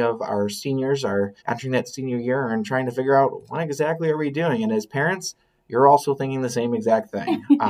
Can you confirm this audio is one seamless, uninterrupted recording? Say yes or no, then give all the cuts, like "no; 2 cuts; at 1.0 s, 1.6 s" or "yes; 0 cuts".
no; 1 cut; at 1.4 s